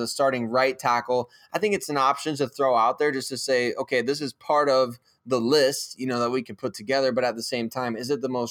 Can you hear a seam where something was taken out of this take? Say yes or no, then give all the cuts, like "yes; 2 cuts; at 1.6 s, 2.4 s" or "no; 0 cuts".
no; 0 cuts